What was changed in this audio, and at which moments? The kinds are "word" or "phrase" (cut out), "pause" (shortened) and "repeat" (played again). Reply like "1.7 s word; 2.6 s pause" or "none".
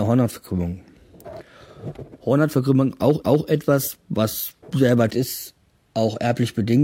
3.2 s repeat; 4.6 s pause; 5.1 s word